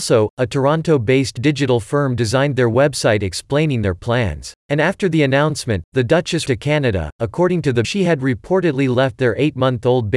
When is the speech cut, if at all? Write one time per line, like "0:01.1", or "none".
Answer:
0:04.6
0:06.5
0:07.8